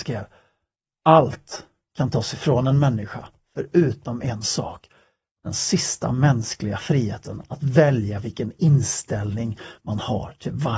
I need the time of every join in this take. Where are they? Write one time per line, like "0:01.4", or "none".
none